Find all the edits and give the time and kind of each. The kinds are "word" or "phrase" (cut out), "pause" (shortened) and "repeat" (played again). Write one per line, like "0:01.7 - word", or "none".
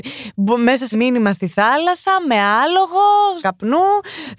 0:00.9 - word
0:03.4 - word

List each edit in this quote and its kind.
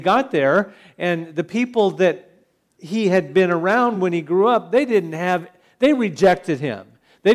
none

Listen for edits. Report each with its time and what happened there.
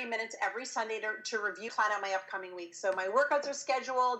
0:01.7 - word

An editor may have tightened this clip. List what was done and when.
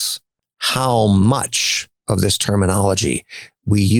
0:01.9 - pause

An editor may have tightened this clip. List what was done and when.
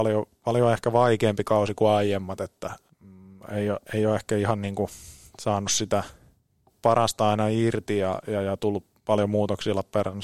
0:02.9 - phrase

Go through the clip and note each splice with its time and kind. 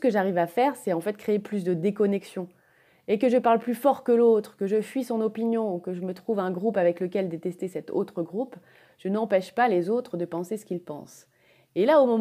none

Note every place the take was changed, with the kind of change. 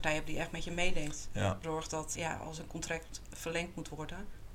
0:01.6 - word
0:02.2 - word

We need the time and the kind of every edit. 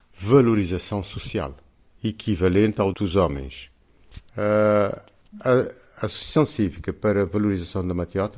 0:01.8 - pause
0:02.9 - phrase
0:04.3 - pause

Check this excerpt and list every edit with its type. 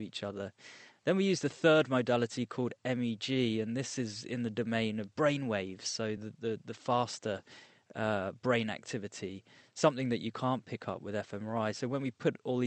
none

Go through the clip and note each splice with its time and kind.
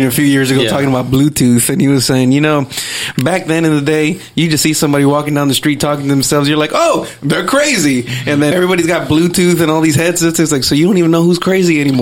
0:08.5 - word

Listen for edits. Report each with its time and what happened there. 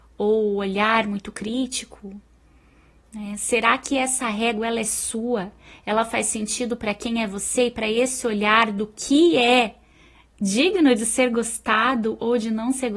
none

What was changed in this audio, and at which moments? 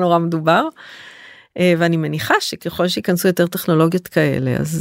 none

